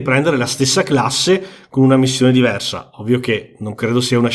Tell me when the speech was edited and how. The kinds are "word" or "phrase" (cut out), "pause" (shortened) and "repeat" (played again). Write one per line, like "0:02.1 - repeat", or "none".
none